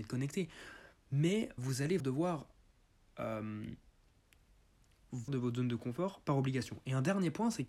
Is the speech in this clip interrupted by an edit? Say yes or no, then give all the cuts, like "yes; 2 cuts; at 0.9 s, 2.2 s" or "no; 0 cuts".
yes; 3 cuts; at 1.6 s, 2.0 s, 5.3 s